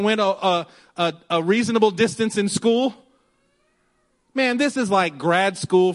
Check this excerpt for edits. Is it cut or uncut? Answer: uncut